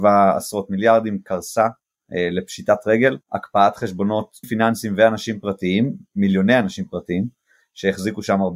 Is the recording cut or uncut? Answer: cut